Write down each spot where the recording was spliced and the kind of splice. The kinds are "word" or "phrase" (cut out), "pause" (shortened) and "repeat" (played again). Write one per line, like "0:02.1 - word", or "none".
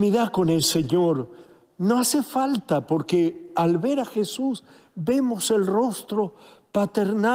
none